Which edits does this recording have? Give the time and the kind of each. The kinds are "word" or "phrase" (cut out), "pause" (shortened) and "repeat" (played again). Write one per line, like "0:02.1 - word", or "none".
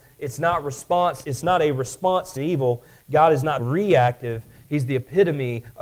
0:01.2 - word
0:02.4 - word
0:03.6 - word